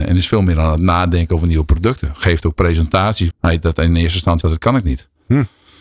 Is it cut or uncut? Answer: cut